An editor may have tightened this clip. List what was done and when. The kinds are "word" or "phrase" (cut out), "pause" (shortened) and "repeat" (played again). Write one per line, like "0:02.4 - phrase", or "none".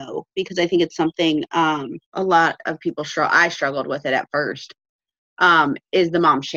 0:02.0 - pause